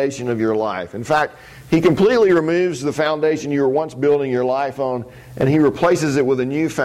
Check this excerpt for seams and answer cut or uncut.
uncut